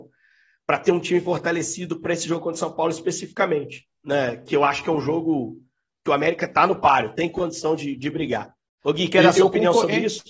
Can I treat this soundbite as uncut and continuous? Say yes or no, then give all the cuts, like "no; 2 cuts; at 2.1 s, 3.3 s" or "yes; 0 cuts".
no; 1 cut; at 3.9 s